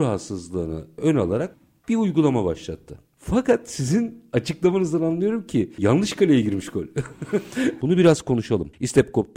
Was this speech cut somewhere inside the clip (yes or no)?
no